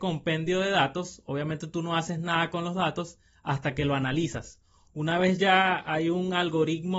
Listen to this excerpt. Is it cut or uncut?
uncut